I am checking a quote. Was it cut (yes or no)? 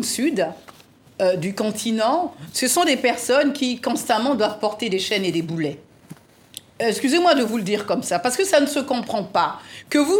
no